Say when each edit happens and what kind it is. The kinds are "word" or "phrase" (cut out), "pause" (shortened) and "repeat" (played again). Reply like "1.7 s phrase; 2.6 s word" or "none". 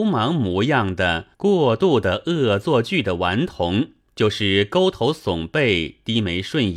1.3 s pause; 4.0 s pause